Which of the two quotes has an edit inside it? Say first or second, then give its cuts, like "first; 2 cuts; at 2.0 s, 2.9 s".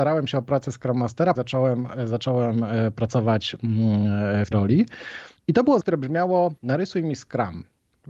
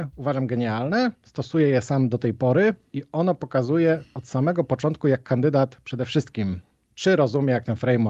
first; 5 cuts; at 1.3 s, 4.5 s, 5.4 s, 5.8 s, 6.6 s